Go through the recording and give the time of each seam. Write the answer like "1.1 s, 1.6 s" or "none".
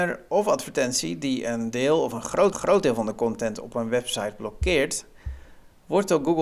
2.5 s

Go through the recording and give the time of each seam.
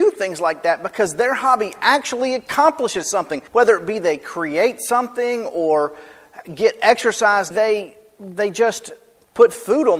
3.5 s, 7.5 s

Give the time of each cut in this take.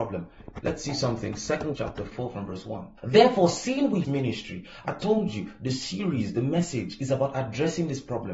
1.8 s, 3.0 s, 4.0 s

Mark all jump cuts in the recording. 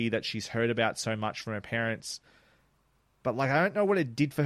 none

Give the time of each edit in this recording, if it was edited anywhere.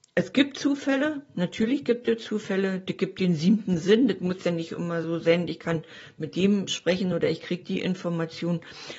none

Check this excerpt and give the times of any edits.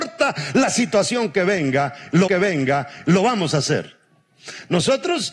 2.3 s

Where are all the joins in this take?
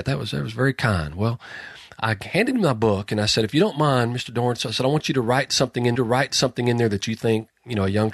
5.9 s

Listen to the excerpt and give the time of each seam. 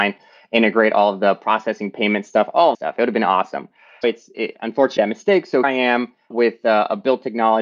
2.7 s, 4.0 s, 4.3 s, 5.0 s, 5.6 s, 6.3 s

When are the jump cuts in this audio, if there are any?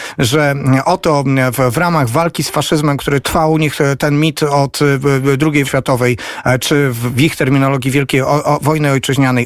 3.2 s, 5.6 s

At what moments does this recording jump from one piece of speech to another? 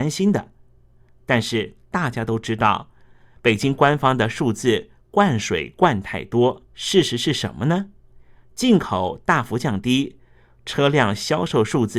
6.7 s

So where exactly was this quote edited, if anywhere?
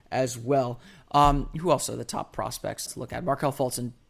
2.9 s

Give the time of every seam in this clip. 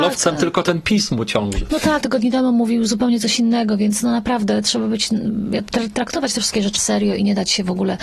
2.0 s, 6.8 s

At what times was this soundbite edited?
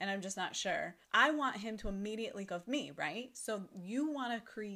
1.0 s, 2.5 s

